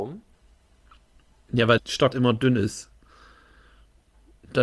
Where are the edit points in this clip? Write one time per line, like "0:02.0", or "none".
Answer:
0:01.8
0:02.1